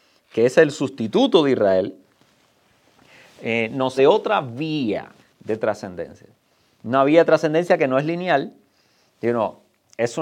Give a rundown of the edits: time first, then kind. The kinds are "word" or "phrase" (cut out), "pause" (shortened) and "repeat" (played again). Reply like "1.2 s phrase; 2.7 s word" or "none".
4.0 s word